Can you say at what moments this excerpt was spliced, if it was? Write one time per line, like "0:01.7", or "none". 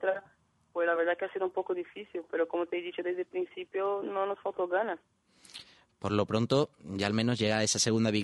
none

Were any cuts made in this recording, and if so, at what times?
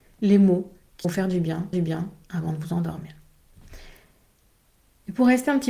0:01.0
0:01.7

